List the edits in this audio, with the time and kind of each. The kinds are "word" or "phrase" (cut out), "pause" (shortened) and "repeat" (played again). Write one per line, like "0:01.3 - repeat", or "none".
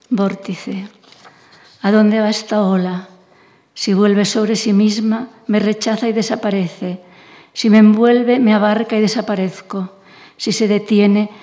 none